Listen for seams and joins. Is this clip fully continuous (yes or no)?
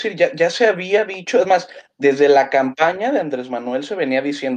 yes